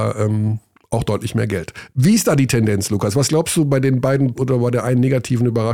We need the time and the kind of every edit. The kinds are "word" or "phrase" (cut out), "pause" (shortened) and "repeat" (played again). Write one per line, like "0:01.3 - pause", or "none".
0:04.4 - word